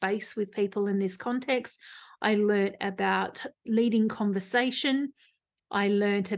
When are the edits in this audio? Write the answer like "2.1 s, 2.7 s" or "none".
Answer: none